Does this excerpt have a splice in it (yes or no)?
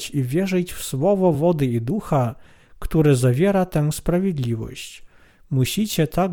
no